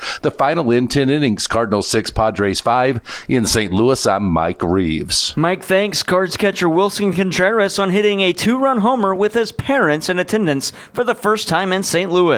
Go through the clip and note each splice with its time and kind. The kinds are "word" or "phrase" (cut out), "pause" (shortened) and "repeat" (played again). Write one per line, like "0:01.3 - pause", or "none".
none